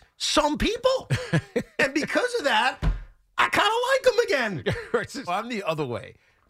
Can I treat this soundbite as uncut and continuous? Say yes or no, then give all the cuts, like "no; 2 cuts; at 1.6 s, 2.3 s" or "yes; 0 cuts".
no; 1 cut; at 5.3 s